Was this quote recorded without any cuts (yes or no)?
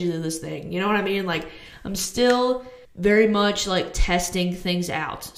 no